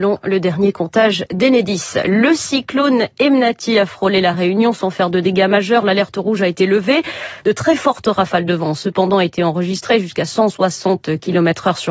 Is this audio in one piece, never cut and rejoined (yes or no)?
yes